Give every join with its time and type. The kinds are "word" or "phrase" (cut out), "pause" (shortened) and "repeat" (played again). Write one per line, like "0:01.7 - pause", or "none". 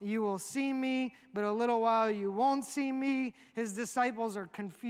none